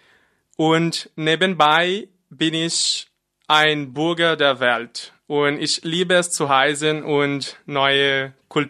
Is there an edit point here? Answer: no; 0 cuts

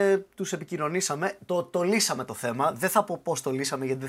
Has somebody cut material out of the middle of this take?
no; 0 cuts

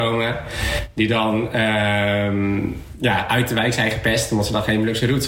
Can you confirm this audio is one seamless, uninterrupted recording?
yes; 0 cuts

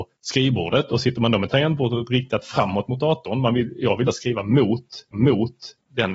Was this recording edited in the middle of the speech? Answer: yes; 2 cuts; at 4.1 s, 5.1 s

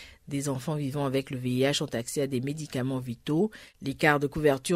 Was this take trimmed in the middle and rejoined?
no; 0 cuts

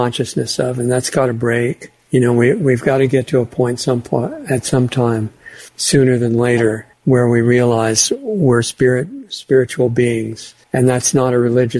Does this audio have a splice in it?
yes; 4 cuts; at 2.0 s, 5.7 s, 6.9 s, 10.6 s

